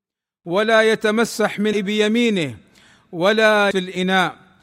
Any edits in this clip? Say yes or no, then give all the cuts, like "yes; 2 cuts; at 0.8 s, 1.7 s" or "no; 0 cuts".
yes; 2 cuts; at 1.7 s, 3.7 s